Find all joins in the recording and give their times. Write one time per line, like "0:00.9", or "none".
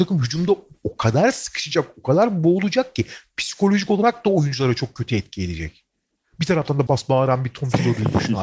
0:06.9

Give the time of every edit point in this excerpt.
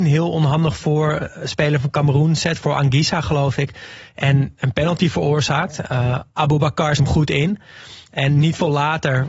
0:07.0

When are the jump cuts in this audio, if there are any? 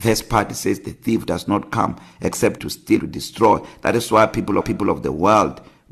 0:02.6
0:03.0
0:04.6

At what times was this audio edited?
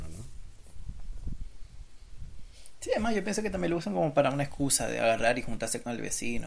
none

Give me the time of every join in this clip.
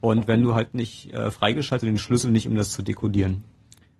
0:01.8

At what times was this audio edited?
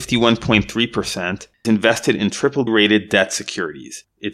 0:01.6
0:02.7

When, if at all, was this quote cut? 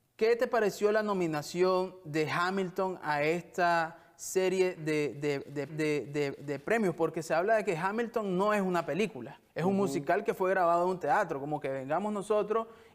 0:05.7
0:09.5

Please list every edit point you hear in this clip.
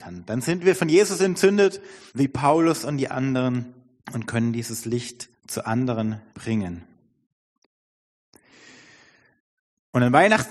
0:02.1
0:04.0
0:05.3
0:06.3

